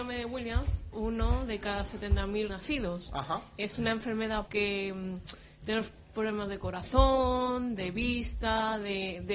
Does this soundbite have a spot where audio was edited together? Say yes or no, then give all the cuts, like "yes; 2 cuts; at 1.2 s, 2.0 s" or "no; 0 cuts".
yes; 3 cuts; at 0.9 s, 2.5 s, 4.5 s